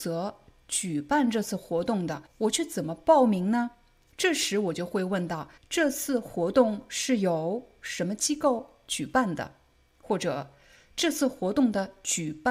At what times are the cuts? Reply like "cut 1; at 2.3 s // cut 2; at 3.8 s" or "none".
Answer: cut 1; at 2.3 s // cut 2; at 5.6 s